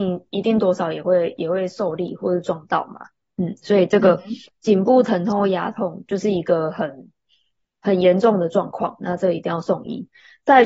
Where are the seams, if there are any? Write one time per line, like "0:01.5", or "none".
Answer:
none

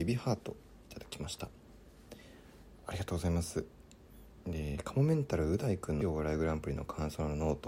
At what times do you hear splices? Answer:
0:06.0

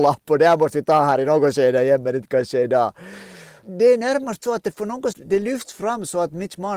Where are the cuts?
0:05.1

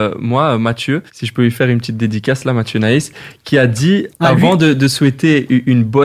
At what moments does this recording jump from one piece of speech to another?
0:01.1
0:04.1

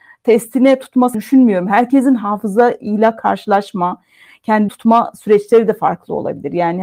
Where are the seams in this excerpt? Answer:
0:01.1
0:04.7

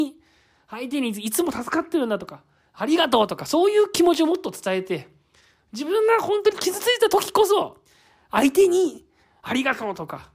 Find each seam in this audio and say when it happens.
none

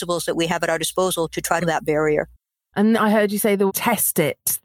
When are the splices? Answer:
0:01.3
0:01.6
0:02.9
0:03.7

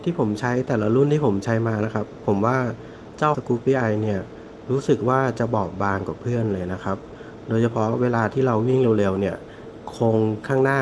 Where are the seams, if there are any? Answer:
0:03.3

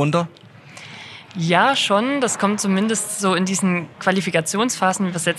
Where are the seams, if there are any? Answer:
none

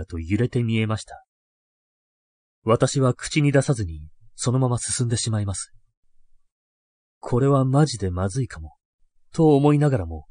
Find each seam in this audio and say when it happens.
none

